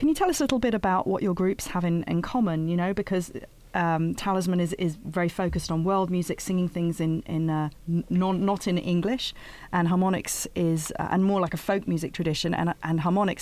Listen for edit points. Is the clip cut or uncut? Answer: uncut